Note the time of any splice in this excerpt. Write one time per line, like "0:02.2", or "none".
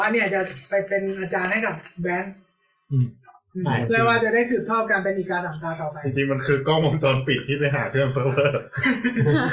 none